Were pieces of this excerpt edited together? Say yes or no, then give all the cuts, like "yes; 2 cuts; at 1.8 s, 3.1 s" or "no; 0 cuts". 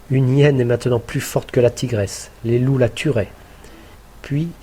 no; 0 cuts